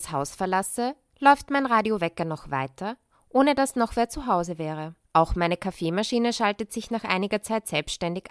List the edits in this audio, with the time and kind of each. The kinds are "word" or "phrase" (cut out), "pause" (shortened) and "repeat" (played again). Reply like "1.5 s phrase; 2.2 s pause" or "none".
5.0 s pause